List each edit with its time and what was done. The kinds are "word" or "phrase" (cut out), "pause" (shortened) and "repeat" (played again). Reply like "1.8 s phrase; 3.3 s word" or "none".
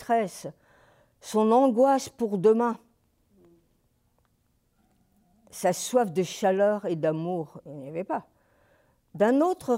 none